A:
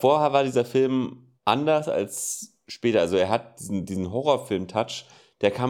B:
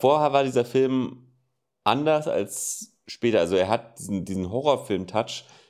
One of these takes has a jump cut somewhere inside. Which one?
A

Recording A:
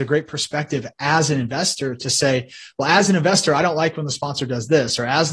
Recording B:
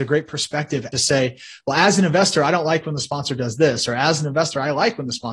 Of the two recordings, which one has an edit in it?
B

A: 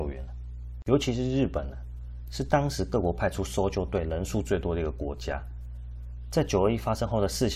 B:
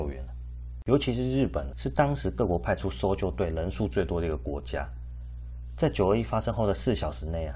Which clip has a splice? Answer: B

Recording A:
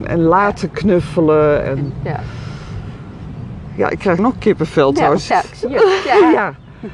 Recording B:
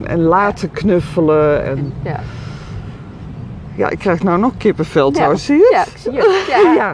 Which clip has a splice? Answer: A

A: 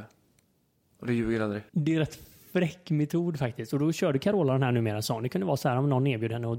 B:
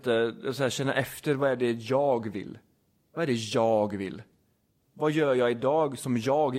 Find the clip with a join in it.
A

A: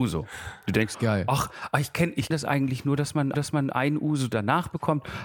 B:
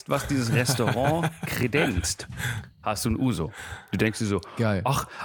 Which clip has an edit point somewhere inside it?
A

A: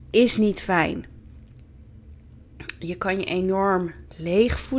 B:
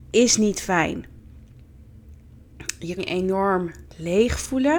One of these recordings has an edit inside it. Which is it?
B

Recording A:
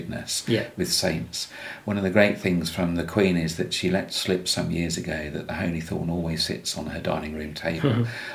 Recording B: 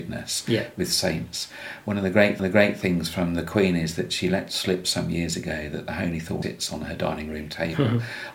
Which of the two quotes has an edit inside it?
B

